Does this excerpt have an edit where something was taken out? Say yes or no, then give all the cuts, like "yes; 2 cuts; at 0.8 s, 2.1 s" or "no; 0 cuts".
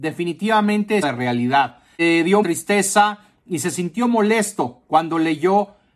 yes; 2 cuts; at 1.0 s, 2.4 s